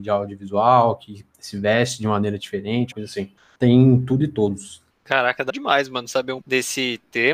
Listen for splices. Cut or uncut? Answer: cut